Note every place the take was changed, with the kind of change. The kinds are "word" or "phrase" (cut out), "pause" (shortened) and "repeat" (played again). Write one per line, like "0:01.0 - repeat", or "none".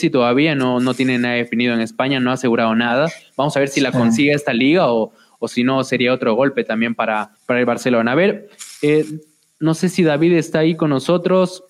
0:07.4 - pause